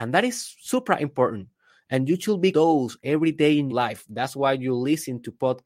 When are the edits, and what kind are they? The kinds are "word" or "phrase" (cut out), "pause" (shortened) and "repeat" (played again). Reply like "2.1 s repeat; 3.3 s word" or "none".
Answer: 2.5 s word; 3.7 s word